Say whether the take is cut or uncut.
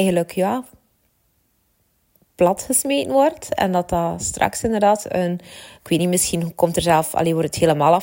uncut